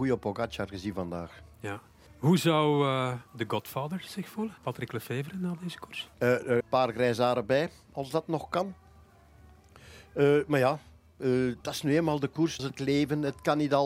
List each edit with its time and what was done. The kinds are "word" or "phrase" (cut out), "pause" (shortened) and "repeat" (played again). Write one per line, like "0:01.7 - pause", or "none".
0:02.1 - pause
0:03.3 - pause
0:04.6 - pause
0:06.1 - pause
0:06.6 - word
0:11.6 - pause
0:12.6 - word